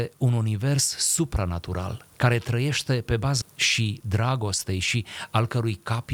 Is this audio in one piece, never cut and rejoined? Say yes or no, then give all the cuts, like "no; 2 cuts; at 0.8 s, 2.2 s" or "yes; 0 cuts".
no; 2 cuts; at 2.1 s, 3.4 s